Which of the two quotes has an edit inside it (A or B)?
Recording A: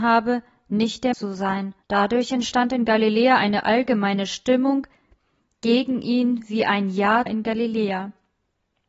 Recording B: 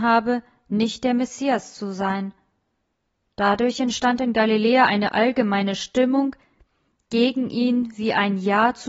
A